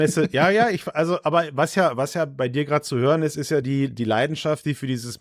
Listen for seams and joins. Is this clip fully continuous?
yes; 0 cuts

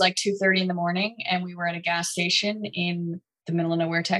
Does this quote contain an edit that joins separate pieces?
no; 0 cuts

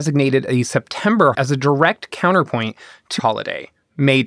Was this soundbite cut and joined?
yes; 2 cuts; at 1.3 s, 3.2 s

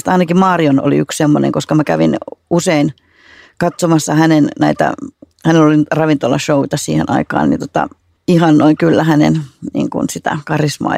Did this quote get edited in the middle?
no; 0 cuts

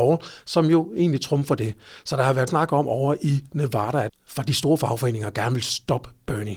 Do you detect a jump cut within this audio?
yes; 2 cuts; at 2.5 s, 4.1 s

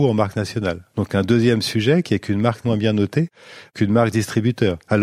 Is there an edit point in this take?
yes; 1 cut; at 2.6 s

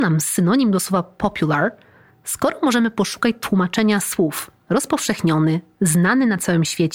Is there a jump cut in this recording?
no; 0 cuts

